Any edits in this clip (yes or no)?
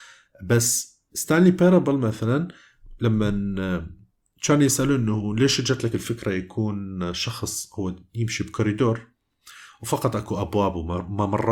no